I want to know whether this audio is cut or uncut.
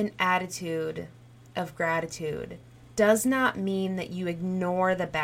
uncut